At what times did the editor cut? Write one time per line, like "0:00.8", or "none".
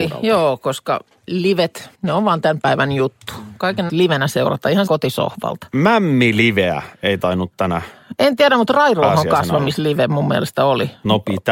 0:01.9
0:03.9
0:04.9
0:06.9